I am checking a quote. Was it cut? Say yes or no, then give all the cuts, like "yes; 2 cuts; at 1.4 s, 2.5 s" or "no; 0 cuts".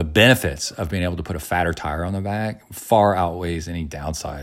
no; 0 cuts